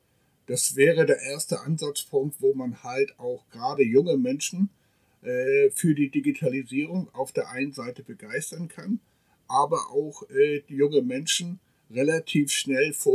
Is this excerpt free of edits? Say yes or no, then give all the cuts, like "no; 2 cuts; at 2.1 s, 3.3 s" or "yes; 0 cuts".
yes; 0 cuts